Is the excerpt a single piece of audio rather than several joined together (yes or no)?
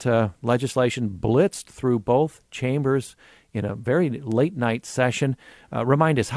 yes